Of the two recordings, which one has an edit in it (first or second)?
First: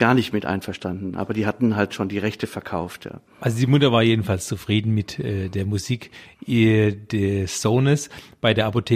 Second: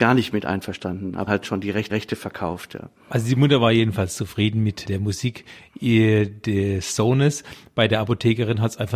second